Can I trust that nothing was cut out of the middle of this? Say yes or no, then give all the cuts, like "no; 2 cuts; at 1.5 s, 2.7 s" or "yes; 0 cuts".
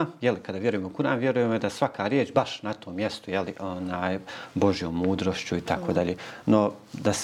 yes; 0 cuts